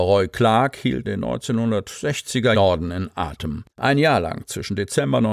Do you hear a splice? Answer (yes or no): yes